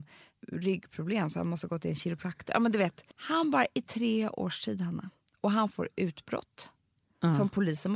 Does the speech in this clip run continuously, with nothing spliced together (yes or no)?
no